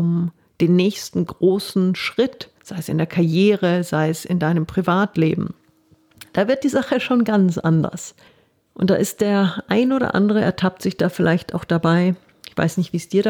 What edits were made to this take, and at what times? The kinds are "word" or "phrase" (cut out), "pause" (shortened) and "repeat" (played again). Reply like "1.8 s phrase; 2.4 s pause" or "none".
2.6 s pause; 8.3 s pause